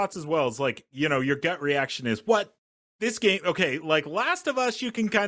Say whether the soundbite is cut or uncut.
uncut